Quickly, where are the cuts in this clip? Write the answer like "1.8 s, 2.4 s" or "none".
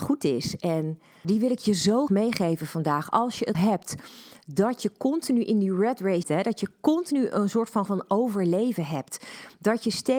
1.2 s, 2.1 s, 3.5 s, 6.2 s, 7.9 s

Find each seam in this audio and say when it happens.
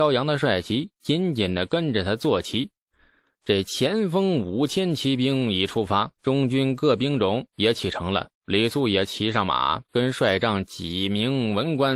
6.2 s, 8.3 s

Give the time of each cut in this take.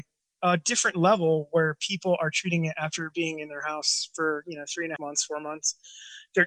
5.0 s

